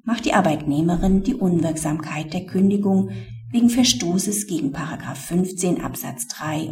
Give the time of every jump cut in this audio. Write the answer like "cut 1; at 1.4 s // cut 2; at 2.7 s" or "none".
none